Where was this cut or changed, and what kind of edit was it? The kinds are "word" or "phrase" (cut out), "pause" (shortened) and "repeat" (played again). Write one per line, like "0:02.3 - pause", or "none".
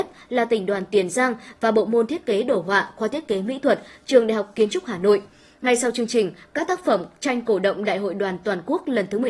none